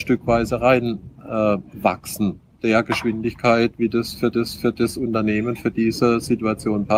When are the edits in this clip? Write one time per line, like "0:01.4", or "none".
0:02.6
0:04.3

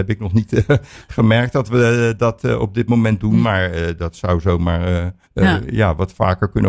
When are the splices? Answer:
0:05.2

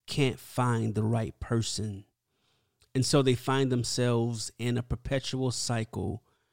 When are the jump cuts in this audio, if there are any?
none

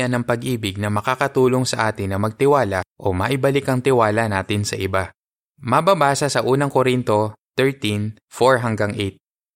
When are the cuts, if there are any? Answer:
0:02.9
0:05.2
0:08.2

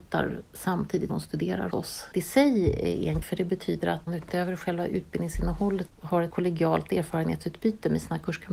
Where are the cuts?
0:01.1
0:01.7
0:02.1
0:03.2
0:04.1
0:05.9
0:06.3

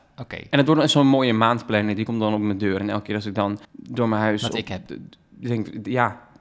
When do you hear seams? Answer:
0:03.6

